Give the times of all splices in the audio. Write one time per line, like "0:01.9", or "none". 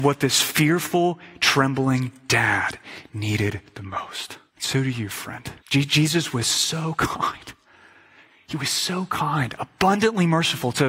0:04.5
0:05.6

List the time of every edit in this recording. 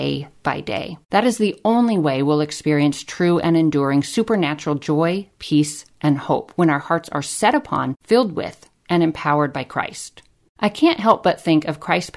none

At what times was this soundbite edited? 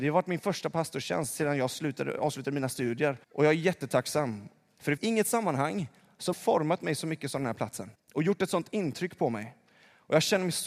0:03.2
0:05.0
0:06.3
0:07.9

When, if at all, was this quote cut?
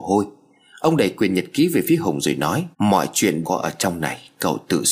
0:02.7
0:03.4

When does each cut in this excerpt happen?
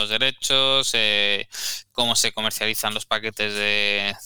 none

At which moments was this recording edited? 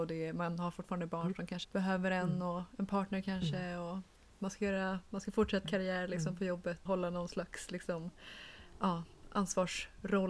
0:01.6
0:05.7
0:06.9

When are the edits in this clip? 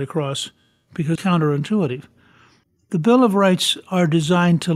0:01.2

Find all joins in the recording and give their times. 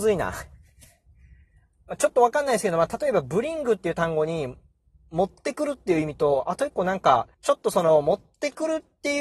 0:07.3

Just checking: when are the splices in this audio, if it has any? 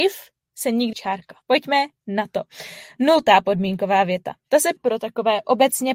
0:00.9
0:01.4
0:04.8

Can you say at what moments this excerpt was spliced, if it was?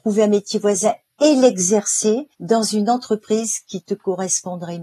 0:02.3

